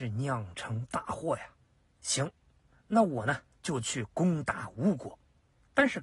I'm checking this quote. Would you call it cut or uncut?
uncut